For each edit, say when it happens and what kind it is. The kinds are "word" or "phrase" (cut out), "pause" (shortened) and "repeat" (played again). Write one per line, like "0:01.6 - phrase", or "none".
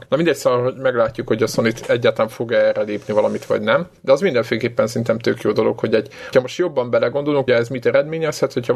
0:06.3 - word
0:07.5 - word